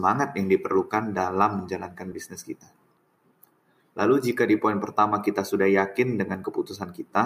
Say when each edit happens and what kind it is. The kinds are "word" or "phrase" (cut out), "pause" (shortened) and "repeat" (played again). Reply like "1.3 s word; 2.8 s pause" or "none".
none